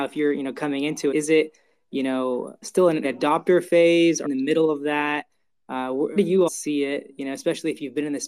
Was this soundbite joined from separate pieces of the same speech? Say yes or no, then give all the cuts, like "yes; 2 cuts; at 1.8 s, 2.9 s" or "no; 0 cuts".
yes; 6 cuts; at 1.1 s, 2.6 s, 3.0 s, 4.2 s, 6.2 s, 6.5 s